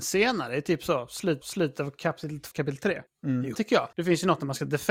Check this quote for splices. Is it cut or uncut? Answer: cut